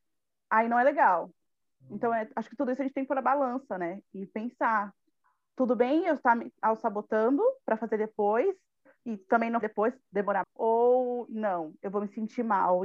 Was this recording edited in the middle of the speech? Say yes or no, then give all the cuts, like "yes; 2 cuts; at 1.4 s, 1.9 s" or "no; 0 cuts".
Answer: yes; 2 cuts; at 9.6 s, 10.4 s